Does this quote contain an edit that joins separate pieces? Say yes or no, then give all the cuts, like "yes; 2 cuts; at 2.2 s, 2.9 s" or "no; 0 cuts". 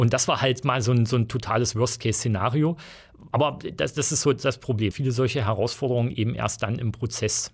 yes; 1 cut; at 4.9 s